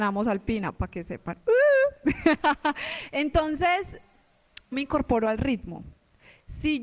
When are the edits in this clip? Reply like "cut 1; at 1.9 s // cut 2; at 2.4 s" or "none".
cut 1; at 4.7 s